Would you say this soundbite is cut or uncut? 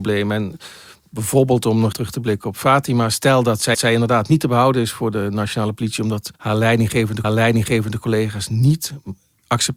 cut